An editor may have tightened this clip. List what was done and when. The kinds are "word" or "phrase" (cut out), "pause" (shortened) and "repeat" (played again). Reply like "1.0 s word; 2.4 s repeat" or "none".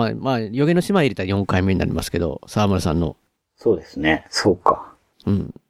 3.3 s pause